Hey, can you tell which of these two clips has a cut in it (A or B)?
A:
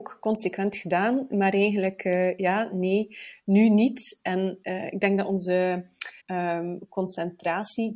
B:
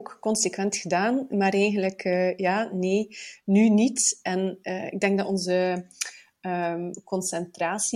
A